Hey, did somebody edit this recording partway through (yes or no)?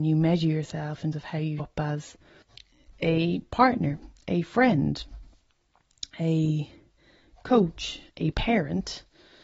yes